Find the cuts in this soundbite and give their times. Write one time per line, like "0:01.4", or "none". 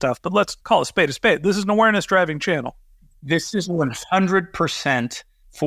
none